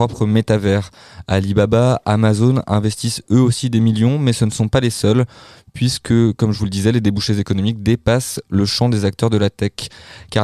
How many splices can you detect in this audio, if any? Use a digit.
0